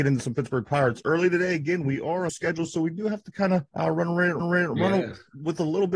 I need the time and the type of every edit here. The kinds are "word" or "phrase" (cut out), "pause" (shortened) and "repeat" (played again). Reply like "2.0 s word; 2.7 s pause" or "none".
2.3 s phrase; 3.7 s pause; 4.4 s repeat